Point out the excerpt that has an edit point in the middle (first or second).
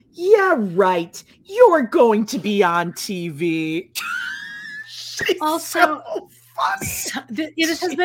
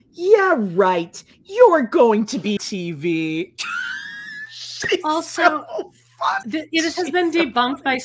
second